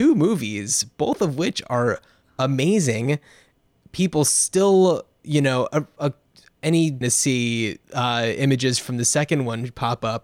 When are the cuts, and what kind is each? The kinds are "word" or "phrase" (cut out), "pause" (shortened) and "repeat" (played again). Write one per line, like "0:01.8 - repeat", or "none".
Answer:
0:07.0 - phrase
0:07.8 - pause